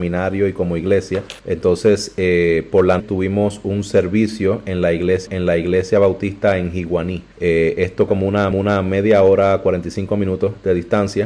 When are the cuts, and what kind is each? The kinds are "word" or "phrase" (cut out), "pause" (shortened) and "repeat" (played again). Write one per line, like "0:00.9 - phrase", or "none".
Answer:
0:01.4 - pause
0:03.0 - word
0:05.3 - repeat
0:07.3 - pause
0:08.1 - word
0:08.5 - repeat